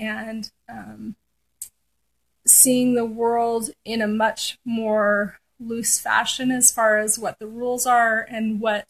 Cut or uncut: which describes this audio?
uncut